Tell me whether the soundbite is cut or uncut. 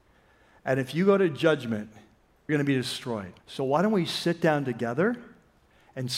cut